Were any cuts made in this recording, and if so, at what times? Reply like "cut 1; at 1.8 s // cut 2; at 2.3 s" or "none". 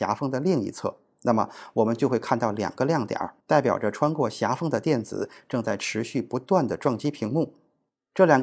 cut 1; at 3.4 s